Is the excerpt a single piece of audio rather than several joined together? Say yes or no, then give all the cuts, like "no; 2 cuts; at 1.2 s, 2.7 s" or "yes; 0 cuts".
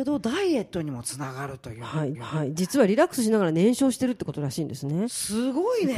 no; 1 cut; at 2.1 s